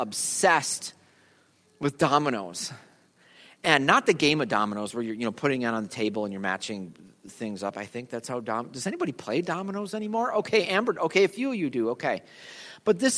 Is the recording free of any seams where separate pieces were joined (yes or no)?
yes